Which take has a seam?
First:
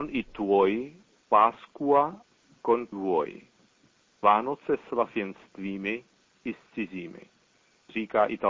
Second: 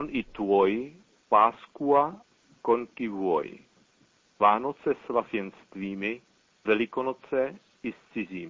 first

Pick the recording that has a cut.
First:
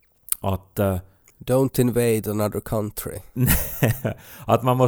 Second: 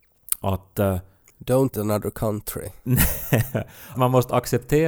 second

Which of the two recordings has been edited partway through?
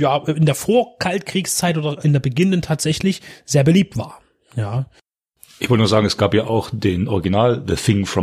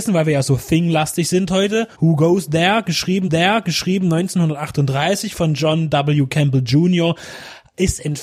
second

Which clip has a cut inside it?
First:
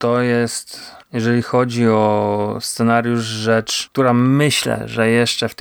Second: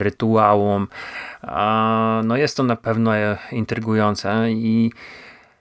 first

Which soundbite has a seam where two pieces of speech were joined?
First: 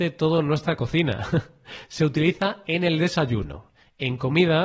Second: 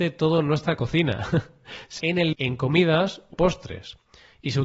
second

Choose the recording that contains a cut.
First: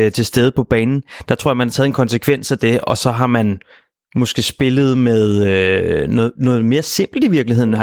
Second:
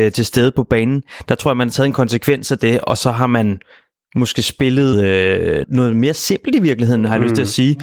second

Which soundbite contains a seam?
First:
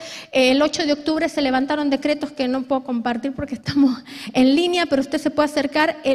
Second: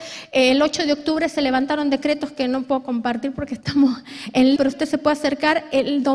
second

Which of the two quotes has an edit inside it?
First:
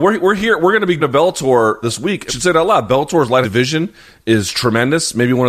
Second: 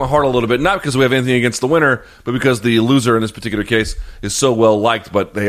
first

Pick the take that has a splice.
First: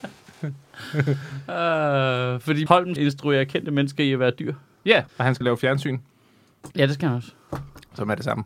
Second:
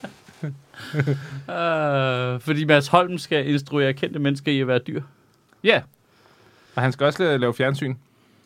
first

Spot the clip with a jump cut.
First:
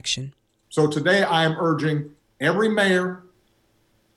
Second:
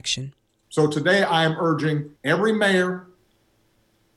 second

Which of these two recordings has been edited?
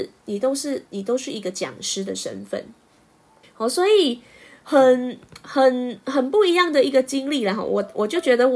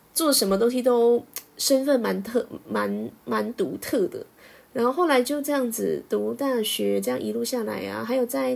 first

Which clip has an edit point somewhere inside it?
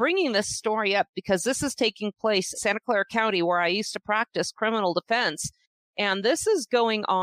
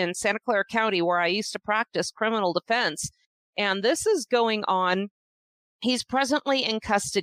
first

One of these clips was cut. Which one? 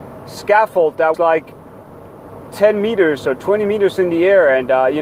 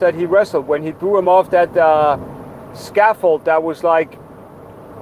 first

